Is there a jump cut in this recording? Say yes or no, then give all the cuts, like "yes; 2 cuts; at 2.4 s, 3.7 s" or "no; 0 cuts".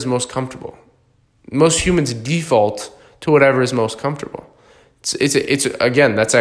no; 0 cuts